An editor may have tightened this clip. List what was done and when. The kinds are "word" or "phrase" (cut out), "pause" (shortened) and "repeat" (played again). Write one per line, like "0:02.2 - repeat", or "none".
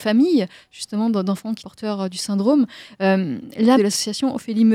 0:01.6 - word
0:03.8 - word